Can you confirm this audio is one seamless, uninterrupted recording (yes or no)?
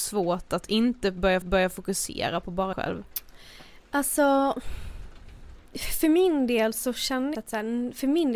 no